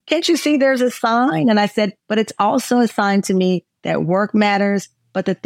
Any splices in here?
yes; 1 cut; at 2.0 s

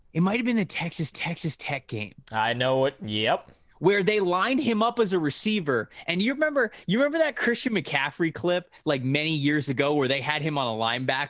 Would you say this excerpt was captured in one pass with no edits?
no; 1 cut; at 1.1 s

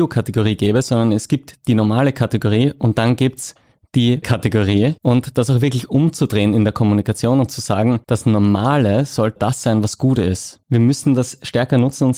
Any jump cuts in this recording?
yes; 5 cuts; at 4.2 s, 5.0 s, 8.0 s, 9.4 s, 10.6 s

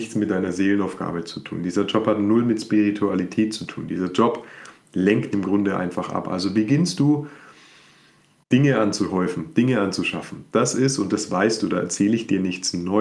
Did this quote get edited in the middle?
yes; 1 cut; at 5.3 s

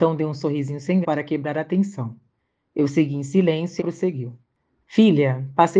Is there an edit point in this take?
yes; 2 cuts; at 1.0 s, 3.8 s

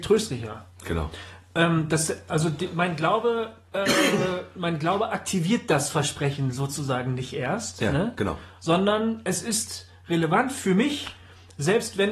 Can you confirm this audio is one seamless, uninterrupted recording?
yes; 0 cuts

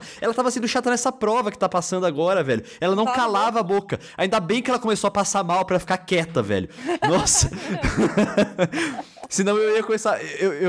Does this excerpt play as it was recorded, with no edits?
yes; 0 cuts

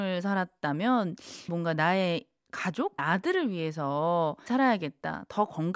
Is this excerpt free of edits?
no; 3 cuts; at 1.5 s, 3.0 s, 4.5 s

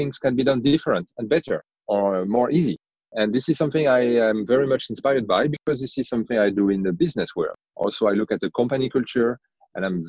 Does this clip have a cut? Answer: yes; 1 cut; at 7.7 s

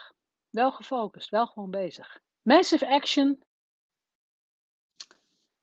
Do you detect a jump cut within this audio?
yes; 1 cut; at 2.3 s

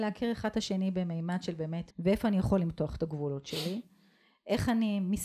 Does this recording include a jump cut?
yes; 1 cut; at 1.9 s

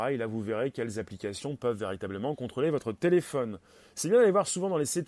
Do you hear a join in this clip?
no; 0 cuts

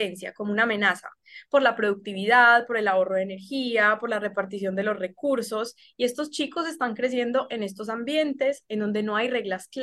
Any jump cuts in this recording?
no; 0 cuts

